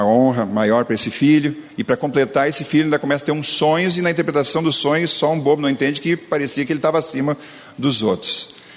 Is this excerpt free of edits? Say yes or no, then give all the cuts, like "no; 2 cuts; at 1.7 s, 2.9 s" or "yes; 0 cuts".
yes; 0 cuts